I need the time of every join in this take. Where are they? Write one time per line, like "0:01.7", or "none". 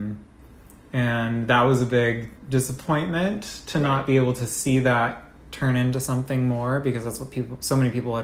0:02.4